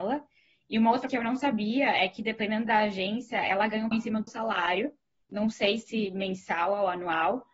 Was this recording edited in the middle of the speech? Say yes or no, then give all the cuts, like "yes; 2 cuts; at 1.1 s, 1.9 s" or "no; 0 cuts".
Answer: yes; 3 cuts; at 1.1 s, 3.9 s, 4.3 s